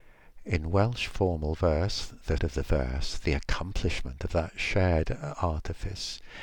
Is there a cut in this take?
yes; 1 cut; at 2.4 s

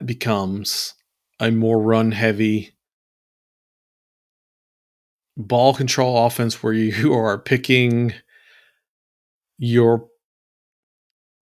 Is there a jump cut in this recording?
no; 0 cuts

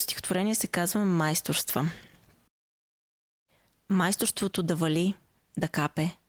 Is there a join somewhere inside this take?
no; 0 cuts

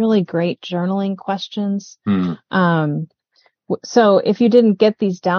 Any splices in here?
no; 0 cuts

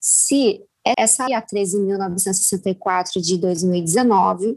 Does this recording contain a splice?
yes; 2 cuts; at 0.9 s, 1.3 s

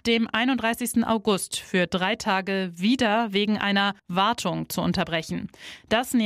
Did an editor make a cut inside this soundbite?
yes; 1 cut; at 4.0 s

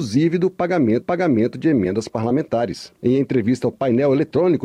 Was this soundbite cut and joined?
yes; 3 cuts; at 1.0 s, 3.0 s, 3.7 s

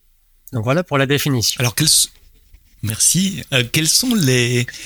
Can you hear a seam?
yes; 1 cut; at 2.8 s

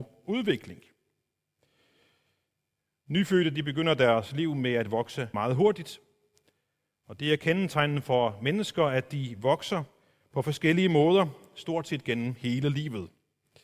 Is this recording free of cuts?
no; 1 cut; at 5.3 s

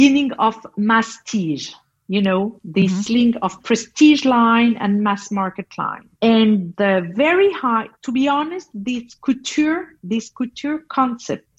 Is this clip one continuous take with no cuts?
no; 3 cuts; at 6.1 s, 8.0 s, 10.0 s

